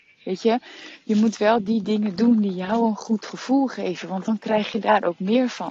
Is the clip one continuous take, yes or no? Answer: yes